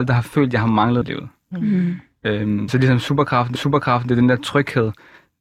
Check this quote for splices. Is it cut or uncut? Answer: cut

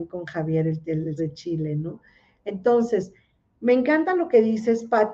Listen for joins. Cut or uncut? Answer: cut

